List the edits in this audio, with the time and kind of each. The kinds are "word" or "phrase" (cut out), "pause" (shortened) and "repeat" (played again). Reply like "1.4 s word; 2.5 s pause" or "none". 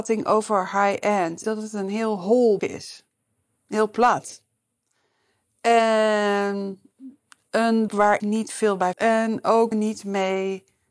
1.4 s word; 2.6 s word; 7.9 s word; 8.2 s word; 8.9 s word; 9.7 s word